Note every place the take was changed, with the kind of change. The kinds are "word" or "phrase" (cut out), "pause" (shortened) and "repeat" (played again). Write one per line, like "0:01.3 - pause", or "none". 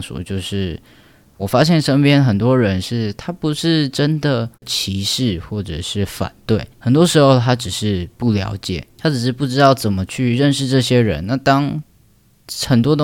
0:01.4 - word
0:04.5 - pause
0:06.7 - pause